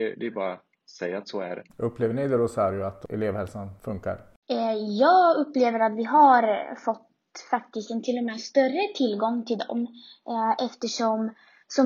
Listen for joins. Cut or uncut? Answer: cut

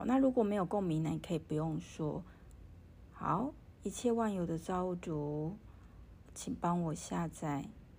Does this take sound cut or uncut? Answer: cut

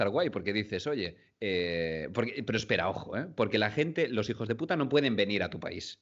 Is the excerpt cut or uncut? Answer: uncut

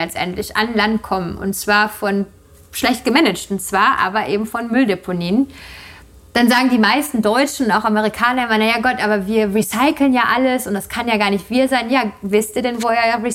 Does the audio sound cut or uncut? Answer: uncut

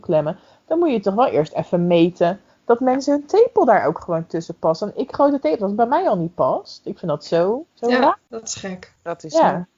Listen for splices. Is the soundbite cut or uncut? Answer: cut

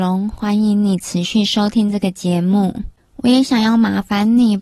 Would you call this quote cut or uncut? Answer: cut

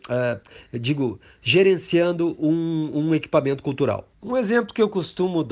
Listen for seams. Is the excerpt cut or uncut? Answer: uncut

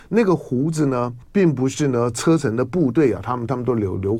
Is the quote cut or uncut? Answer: cut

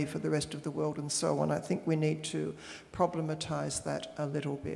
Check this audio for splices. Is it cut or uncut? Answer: uncut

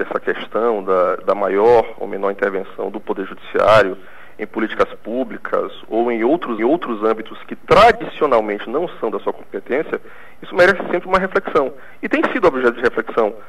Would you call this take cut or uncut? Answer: cut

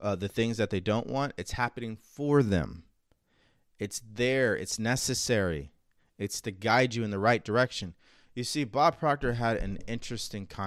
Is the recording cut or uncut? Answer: uncut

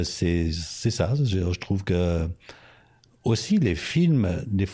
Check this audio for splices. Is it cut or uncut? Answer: uncut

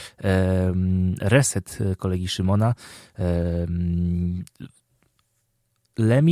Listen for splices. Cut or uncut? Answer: uncut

